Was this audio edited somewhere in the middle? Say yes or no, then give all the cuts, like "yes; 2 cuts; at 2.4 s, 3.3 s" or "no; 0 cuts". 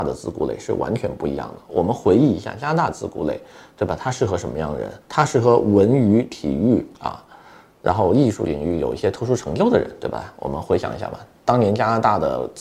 yes; 2 cuts; at 5.0 s, 6.9 s